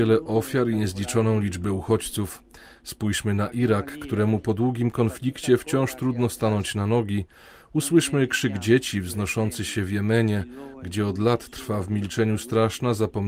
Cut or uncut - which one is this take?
uncut